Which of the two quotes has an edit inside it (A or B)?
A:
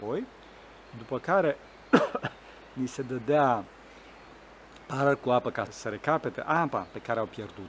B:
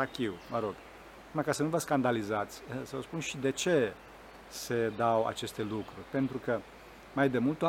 A